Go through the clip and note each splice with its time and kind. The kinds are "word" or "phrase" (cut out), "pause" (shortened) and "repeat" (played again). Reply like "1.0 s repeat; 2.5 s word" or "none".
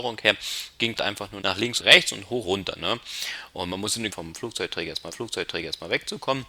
1.0 s word; 1.4 s word; 1.8 s word; 2.4 s word; 4.1 s phrase; 5.1 s repeat